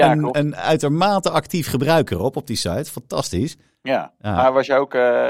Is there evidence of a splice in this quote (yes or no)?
yes